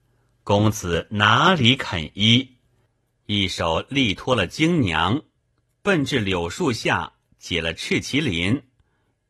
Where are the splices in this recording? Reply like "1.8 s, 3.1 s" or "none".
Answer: none